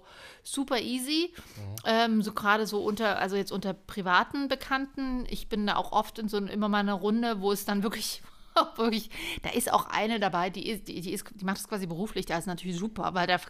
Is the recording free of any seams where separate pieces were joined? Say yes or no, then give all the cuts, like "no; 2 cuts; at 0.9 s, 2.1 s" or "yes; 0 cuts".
yes; 0 cuts